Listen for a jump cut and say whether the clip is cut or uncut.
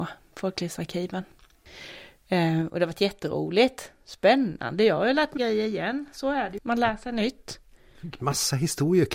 cut